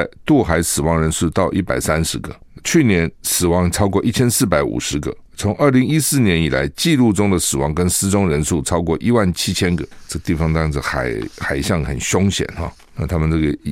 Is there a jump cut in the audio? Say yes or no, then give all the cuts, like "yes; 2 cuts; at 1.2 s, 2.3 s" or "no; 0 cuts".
yes; 2 cuts; at 2.6 s, 3.2 s